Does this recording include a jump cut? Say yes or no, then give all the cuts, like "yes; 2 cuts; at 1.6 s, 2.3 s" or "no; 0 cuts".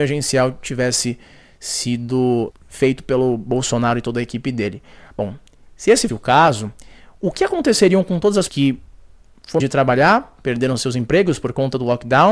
yes; 4 cuts; at 2.5 s, 6.1 s, 8.5 s, 9.6 s